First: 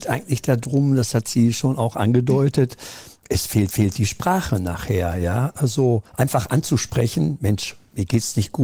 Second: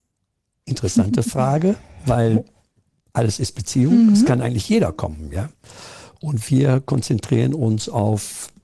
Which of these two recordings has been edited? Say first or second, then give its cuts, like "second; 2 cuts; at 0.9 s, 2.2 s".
first; 2 cuts; at 3.7 s, 6.1 s